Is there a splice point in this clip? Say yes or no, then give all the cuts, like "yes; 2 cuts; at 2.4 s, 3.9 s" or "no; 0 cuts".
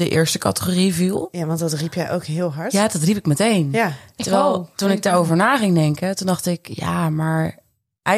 no; 0 cuts